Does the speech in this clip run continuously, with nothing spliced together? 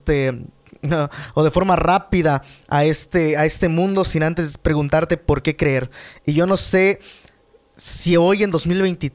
yes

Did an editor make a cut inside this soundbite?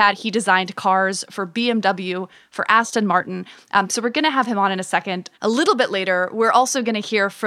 yes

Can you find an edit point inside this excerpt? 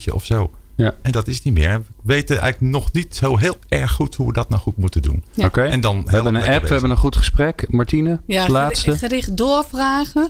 no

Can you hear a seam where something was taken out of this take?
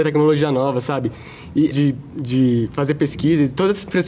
yes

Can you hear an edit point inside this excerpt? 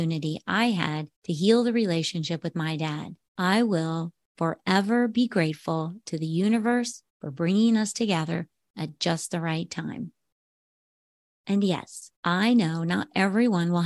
yes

